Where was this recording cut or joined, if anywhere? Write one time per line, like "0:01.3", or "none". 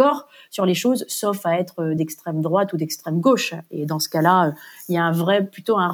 none